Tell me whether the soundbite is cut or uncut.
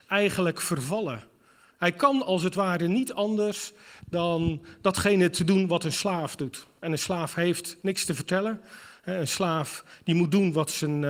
uncut